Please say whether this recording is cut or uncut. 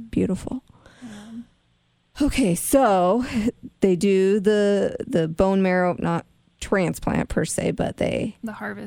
uncut